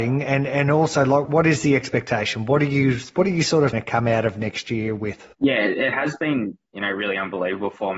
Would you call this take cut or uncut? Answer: cut